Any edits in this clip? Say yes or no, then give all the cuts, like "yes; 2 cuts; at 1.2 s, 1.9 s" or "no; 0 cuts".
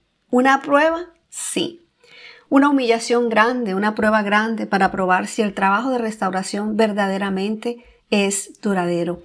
no; 0 cuts